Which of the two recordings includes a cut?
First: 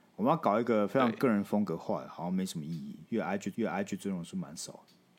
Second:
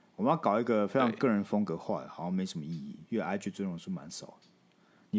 first; 1 cut; at 3.5 s

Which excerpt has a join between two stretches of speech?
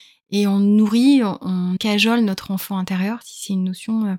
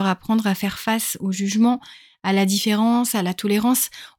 first; 1 cut; at 1.8 s

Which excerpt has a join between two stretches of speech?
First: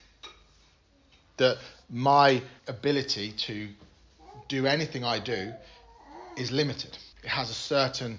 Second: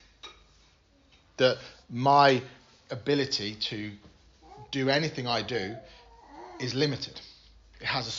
first; 2 cuts; at 2.6 s, 7.1 s

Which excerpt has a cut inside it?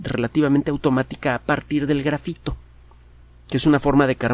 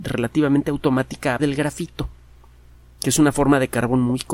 second; 1 cut; at 1.4 s

